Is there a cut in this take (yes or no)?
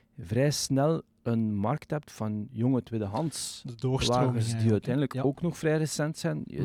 no